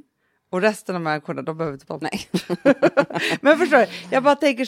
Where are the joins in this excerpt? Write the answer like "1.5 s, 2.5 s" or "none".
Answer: 1.9 s